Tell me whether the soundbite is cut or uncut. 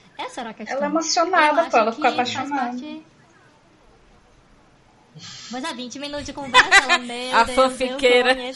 uncut